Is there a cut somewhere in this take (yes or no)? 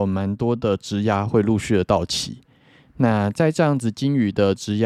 no